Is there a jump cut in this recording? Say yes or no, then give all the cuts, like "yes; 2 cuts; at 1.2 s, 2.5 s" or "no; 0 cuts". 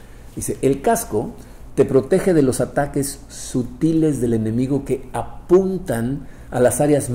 no; 0 cuts